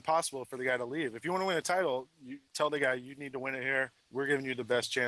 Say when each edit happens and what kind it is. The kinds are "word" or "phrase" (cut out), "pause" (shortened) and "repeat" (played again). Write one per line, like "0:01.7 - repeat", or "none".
0:02.5 - pause
0:04.0 - pause